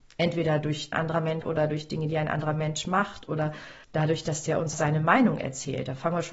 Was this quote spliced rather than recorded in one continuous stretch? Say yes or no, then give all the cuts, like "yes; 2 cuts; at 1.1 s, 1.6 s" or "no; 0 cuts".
yes; 4 cuts; at 0.9 s, 1.4 s, 3.8 s, 4.7 s